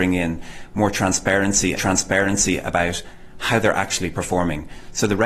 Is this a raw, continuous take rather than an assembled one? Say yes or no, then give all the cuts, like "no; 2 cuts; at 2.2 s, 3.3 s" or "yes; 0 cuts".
no; 1 cut; at 1.8 s